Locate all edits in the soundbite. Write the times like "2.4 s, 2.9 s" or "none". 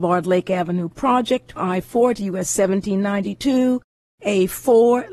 1.6 s